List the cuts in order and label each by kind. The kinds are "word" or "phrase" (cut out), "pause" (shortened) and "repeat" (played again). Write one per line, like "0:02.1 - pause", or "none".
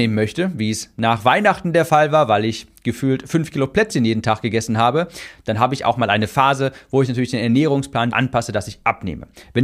0:08.1 - word